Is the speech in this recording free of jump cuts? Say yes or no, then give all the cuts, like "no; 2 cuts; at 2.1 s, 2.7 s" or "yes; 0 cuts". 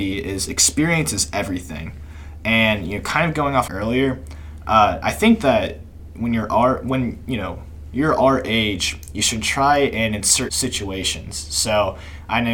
no; 2 cuts; at 3.7 s, 10.5 s